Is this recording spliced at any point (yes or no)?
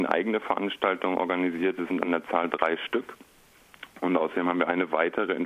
no